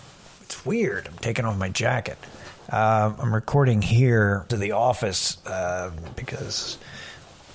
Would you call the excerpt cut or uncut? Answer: cut